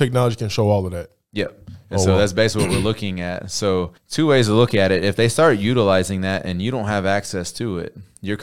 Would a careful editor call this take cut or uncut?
cut